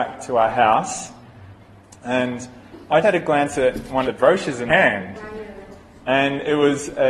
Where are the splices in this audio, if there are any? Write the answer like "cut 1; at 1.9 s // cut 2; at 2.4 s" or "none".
cut 1; at 3.0 s // cut 2; at 4.0 s // cut 3; at 4.7 s

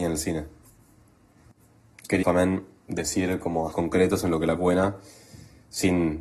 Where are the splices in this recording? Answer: cut 1; at 2.2 s // cut 2; at 3.7 s // cut 3; at 4.6 s

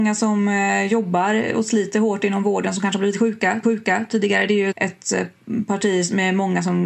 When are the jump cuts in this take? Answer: cut 1; at 3.6 s // cut 2; at 4.7 s

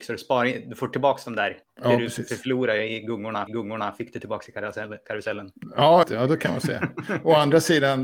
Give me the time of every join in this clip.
cut 1; at 1.6 s // cut 2; at 3.5 s // cut 3; at 6.0 s

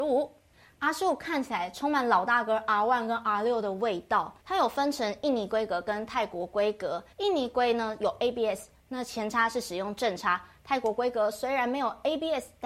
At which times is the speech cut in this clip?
cut 1; at 4.4 s // cut 2; at 7.1 s

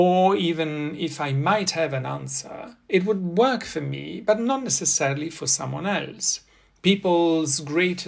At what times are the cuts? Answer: none

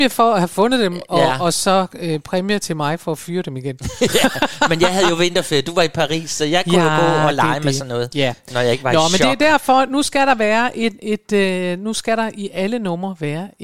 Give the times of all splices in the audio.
none

